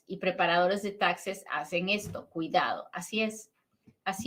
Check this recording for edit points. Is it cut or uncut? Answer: uncut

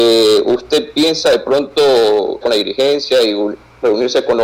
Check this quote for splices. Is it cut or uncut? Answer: cut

